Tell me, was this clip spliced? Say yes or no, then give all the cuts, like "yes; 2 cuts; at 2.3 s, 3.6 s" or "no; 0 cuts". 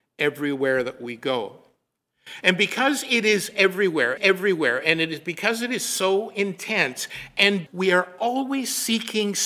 yes; 2 cuts; at 4.2 s, 7.7 s